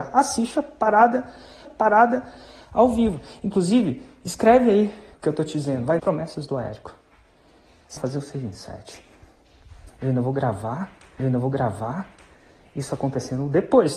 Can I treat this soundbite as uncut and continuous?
no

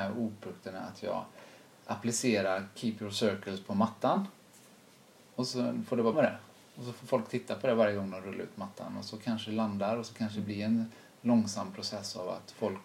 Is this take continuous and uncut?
no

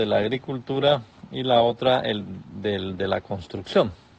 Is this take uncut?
yes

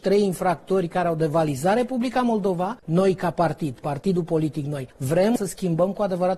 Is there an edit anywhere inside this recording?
no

